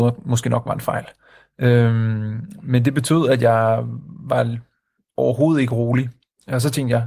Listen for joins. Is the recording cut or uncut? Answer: uncut